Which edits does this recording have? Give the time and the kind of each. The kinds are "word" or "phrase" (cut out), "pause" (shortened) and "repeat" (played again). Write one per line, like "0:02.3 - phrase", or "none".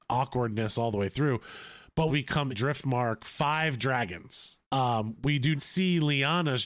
0:02.1 - phrase
0:02.5 - word
0:04.6 - pause
0:05.6 - word